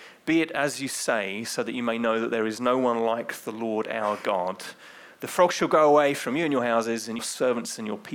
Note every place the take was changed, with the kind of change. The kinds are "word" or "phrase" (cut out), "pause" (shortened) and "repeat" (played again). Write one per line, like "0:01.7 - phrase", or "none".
0:07.2 - phrase